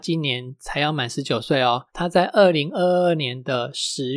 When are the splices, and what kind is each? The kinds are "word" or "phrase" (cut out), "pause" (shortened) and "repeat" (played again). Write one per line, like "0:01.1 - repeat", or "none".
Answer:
0:01.9 - pause